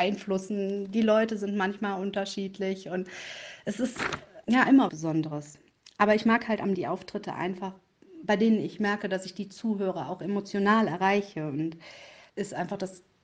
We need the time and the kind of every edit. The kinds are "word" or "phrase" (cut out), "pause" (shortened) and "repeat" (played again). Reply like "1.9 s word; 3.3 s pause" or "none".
4.4 s word; 4.9 s word; 6.7 s word; 12.3 s word